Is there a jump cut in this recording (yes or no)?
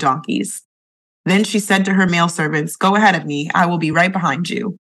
no